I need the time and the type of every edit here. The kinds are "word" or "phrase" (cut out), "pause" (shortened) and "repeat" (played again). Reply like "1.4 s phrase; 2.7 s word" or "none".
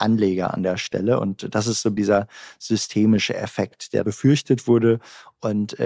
2.0 s word; 4.0 s word